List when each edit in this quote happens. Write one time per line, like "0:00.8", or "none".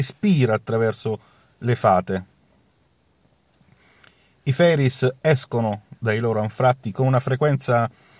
none

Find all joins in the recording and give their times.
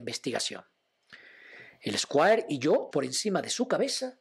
0:02.9

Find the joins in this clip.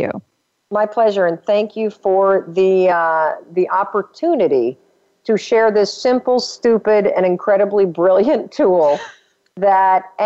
none

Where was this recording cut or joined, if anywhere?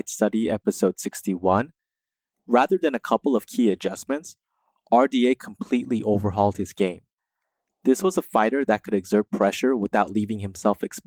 none

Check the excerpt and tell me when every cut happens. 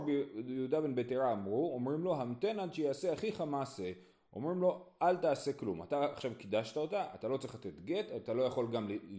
none

